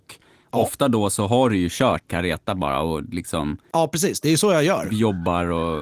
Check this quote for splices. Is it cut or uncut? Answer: cut